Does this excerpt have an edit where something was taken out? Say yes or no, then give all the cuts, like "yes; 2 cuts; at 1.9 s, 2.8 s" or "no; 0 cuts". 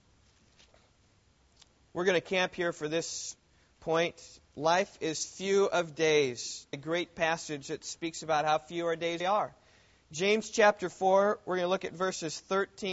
yes; 2 cuts; at 6.7 s, 9.2 s